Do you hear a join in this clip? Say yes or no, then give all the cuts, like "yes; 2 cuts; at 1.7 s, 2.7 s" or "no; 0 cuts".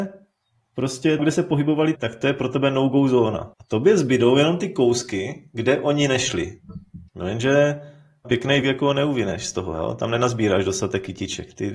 yes; 6 cuts; at 1.2 s, 1.9 s, 3.5 s, 7.1 s, 8.2 s, 8.6 s